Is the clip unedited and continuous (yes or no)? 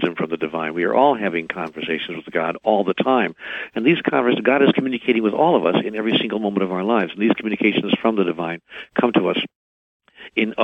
yes